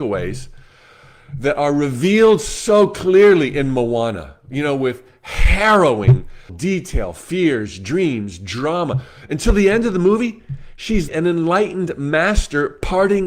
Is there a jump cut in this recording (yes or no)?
yes